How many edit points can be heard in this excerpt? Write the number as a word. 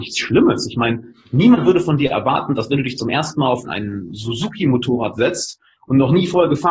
one